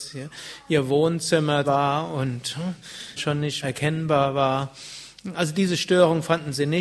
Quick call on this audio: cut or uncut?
cut